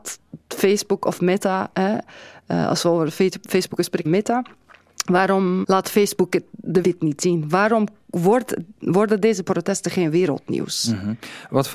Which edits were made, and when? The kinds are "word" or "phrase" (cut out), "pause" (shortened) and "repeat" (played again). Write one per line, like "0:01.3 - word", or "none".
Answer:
0:04.0 - phrase
0:05.6 - word
0:06.8 - word